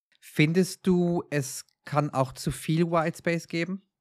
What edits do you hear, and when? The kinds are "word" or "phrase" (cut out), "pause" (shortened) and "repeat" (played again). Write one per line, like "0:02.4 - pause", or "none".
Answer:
none